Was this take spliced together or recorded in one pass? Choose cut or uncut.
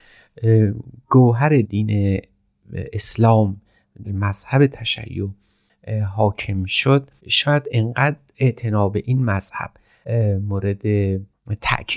cut